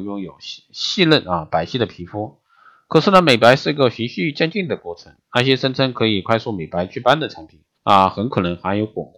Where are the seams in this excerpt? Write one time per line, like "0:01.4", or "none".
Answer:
0:05.2
0:07.7